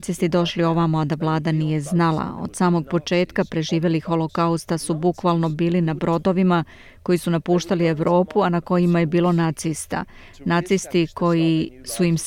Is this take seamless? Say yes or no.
yes